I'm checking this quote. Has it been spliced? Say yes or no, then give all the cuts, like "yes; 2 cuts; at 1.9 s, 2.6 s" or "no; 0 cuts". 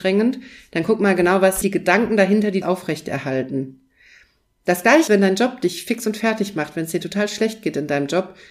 yes; 3 cuts; at 1.6 s, 2.6 s, 5.1 s